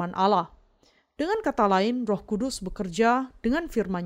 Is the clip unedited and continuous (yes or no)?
yes